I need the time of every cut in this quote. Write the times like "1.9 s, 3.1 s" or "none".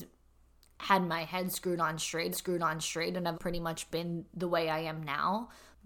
2.3 s, 3.3 s